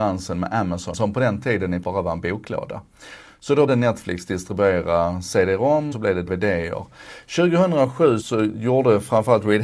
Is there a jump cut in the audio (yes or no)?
yes